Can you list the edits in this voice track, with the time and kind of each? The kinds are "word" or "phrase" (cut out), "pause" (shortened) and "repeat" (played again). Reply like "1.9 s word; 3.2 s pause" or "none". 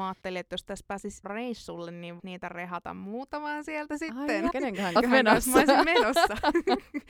1.2 s word; 2.2 s word; 4.5 s word; 5.0 s word